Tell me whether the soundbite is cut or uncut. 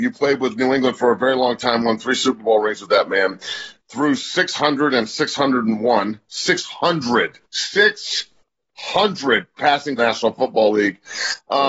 cut